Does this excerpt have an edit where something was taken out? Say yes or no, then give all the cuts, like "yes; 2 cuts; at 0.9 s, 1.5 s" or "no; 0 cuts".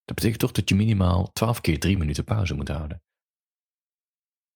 no; 0 cuts